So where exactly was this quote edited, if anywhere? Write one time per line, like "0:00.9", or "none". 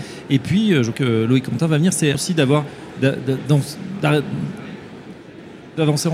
0:00.9
0:02.1